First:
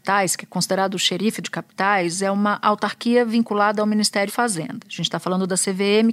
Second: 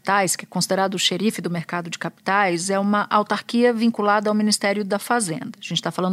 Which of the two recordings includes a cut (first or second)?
first